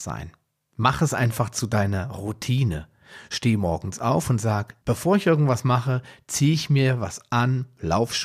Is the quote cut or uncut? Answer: cut